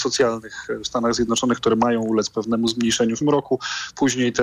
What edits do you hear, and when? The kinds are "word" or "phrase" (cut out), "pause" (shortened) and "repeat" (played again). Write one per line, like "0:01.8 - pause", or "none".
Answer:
0:03.2 - word